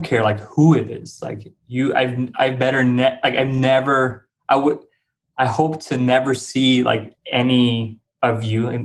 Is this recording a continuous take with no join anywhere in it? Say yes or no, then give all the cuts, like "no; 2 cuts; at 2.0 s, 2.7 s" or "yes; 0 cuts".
yes; 0 cuts